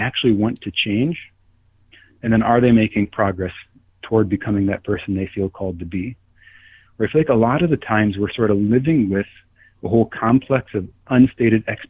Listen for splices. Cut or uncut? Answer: uncut